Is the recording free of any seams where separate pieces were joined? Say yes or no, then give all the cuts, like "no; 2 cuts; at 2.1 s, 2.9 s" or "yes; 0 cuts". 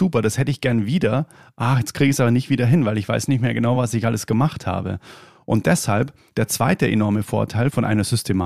yes; 0 cuts